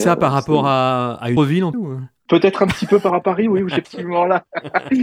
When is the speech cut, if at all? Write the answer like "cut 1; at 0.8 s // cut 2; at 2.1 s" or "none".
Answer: cut 1; at 1.4 s // cut 2; at 1.7 s // cut 3; at 3.1 s // cut 4; at 3.8 s